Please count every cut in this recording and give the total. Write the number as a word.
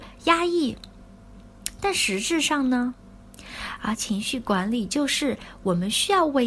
one